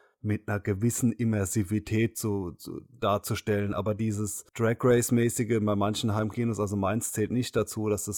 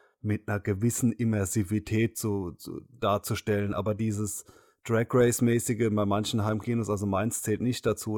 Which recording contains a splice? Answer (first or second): first